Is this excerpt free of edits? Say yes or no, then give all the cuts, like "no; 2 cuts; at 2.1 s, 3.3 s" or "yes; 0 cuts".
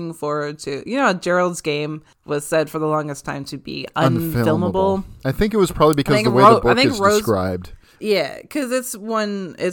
yes; 0 cuts